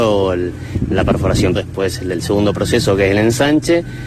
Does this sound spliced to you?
yes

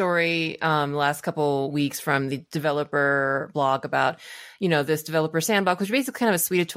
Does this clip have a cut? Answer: no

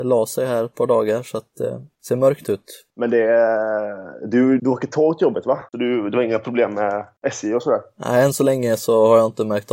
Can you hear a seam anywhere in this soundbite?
yes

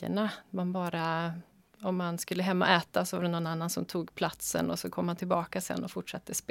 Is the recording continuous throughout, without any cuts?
yes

